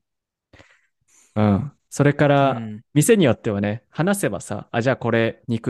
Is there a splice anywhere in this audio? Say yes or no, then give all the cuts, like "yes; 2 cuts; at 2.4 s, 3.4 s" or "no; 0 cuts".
no; 0 cuts